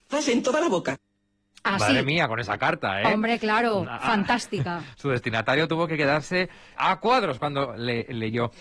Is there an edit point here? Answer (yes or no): yes